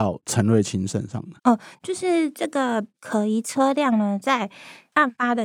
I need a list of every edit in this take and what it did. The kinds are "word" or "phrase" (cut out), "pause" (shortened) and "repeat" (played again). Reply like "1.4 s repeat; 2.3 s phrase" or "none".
1.4 s pause